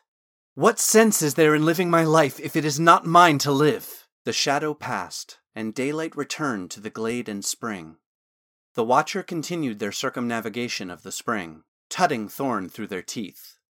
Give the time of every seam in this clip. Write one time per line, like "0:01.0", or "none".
0:04.1